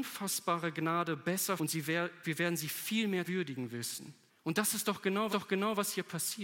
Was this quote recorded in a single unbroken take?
no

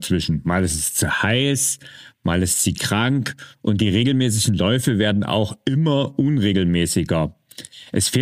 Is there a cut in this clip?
no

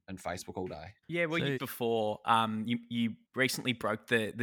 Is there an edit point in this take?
yes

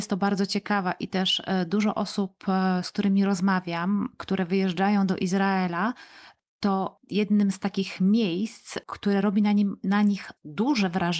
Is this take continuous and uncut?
yes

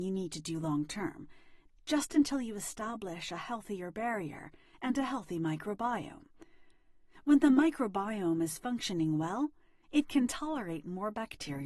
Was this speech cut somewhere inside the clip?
no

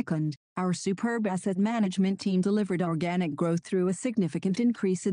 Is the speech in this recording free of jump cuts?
yes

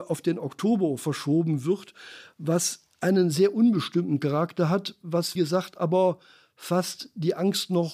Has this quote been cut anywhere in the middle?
yes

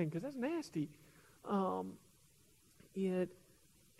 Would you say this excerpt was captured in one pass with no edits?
yes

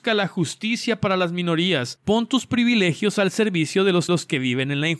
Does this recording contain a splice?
yes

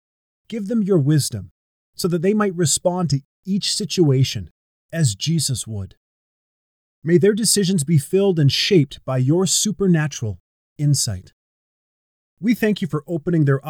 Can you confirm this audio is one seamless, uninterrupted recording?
yes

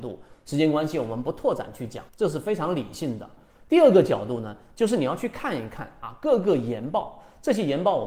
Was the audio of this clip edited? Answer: yes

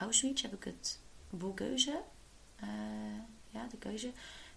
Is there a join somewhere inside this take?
yes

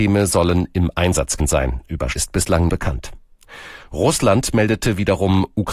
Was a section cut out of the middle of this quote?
yes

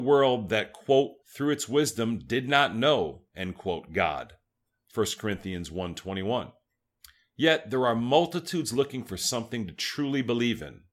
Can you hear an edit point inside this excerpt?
yes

